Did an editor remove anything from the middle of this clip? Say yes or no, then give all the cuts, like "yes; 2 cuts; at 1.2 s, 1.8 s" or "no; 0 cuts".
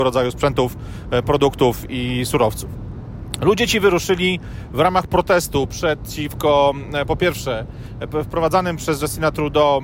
no; 0 cuts